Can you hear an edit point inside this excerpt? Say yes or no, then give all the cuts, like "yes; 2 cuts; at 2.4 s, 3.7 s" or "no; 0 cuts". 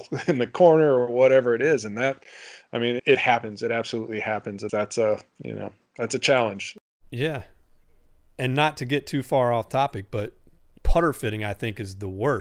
yes; 3 cuts; at 3.0 s, 4.7 s, 10.8 s